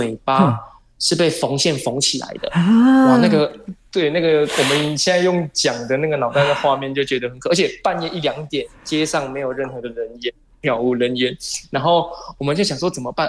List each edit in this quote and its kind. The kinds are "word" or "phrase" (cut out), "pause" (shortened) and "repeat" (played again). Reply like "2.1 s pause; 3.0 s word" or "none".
none

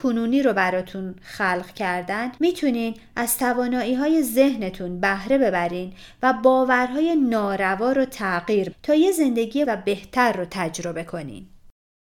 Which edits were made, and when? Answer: 2.4 s pause; 8.7 s word; 9.6 s word

